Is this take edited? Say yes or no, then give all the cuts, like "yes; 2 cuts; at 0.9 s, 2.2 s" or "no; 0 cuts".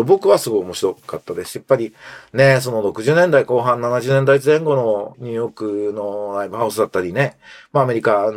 no; 0 cuts